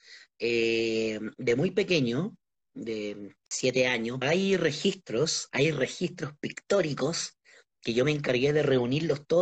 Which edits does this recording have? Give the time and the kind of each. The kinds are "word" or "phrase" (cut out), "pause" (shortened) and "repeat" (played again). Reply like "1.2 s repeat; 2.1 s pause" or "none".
3.4 s pause; 4.2 s phrase